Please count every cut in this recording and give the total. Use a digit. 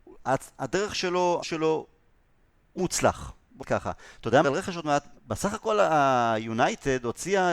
5